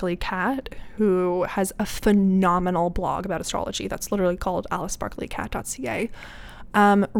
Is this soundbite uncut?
yes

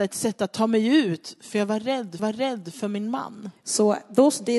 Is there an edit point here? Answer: yes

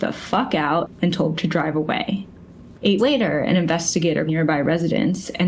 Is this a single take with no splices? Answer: no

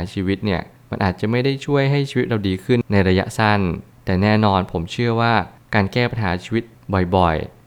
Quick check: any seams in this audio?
no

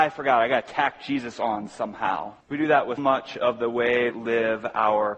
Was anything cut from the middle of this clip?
yes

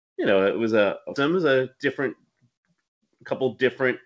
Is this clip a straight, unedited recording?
no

